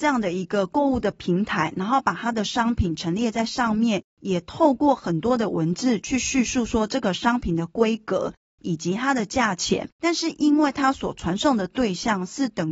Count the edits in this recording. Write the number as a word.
two